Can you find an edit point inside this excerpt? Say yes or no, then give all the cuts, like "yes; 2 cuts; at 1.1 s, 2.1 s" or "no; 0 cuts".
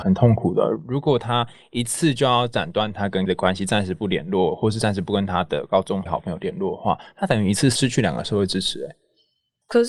yes; 2 cuts; at 3.3 s, 6.1 s